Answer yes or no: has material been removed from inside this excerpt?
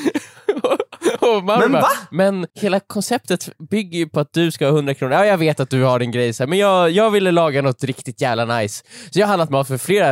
yes